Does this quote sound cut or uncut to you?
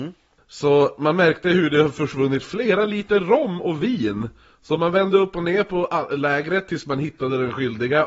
uncut